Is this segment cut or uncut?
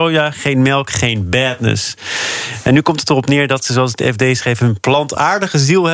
uncut